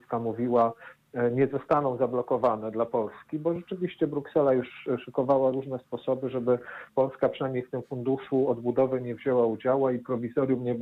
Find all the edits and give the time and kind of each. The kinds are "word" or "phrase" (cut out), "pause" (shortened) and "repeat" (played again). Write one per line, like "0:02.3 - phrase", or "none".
none

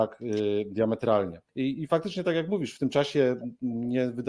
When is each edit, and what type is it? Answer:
0:01.5 - pause

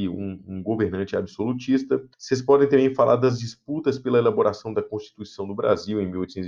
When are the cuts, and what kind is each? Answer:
0:02.1 - pause

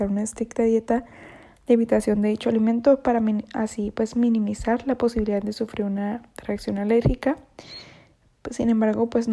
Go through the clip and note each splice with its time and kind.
none

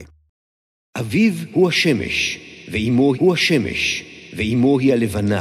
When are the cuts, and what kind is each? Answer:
0:03.1 - repeat

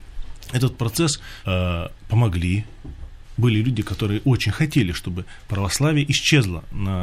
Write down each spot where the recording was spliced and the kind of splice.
0:01.4 - phrase

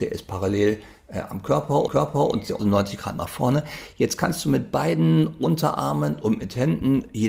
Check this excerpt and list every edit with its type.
0:01.9 - repeat
0:02.6 - word

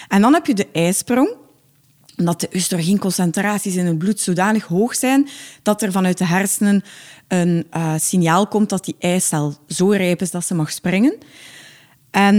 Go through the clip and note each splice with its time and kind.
none

